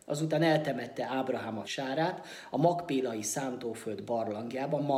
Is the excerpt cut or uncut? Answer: cut